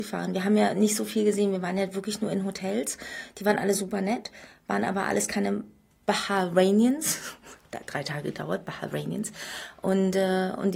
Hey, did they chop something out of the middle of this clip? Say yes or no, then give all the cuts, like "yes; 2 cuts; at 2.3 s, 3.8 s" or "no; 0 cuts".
no; 0 cuts